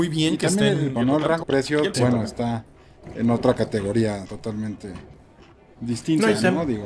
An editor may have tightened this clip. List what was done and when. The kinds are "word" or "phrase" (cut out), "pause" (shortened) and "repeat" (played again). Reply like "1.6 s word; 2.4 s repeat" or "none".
1.0 s word; 1.4 s word; 1.9 s word; 4.2 s word